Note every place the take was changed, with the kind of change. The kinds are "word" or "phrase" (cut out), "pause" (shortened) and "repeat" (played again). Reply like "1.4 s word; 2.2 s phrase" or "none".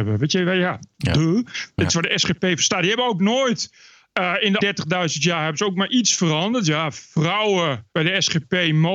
4.6 s word; 7.9 s pause

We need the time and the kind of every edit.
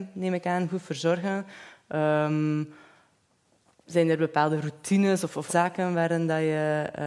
5.5 s word

